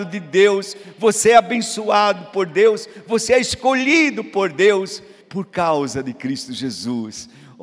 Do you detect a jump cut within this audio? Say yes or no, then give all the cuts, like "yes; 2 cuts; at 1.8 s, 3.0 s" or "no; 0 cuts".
yes; 1 cut; at 5.2 s